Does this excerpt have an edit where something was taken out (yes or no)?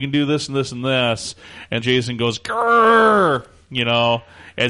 yes